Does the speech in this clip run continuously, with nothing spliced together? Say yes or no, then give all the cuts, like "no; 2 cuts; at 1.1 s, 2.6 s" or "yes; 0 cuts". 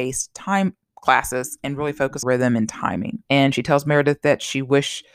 no; 2 cuts; at 2.2 s, 3.3 s